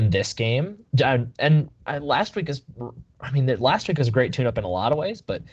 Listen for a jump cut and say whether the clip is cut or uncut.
cut